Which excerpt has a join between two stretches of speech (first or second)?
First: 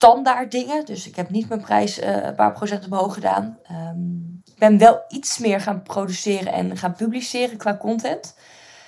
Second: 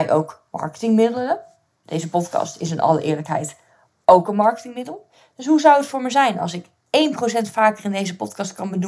first